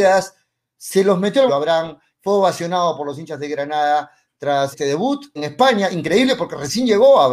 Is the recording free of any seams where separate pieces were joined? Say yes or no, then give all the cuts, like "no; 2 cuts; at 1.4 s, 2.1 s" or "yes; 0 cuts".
no; 3 cuts; at 1.5 s, 4.7 s, 5.4 s